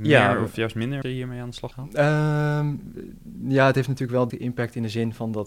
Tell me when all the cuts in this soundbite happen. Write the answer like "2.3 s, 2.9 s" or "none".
1.0 s, 1.7 s, 4.3 s